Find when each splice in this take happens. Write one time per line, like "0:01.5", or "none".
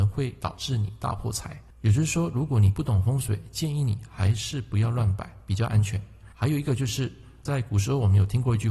0:01.7
0:06.3